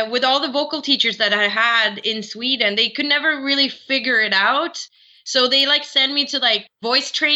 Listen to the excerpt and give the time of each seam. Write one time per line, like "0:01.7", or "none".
none